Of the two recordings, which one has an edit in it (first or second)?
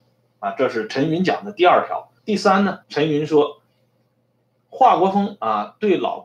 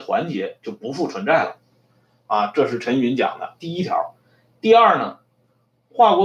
first